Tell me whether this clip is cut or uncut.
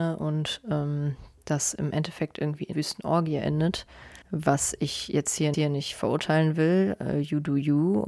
cut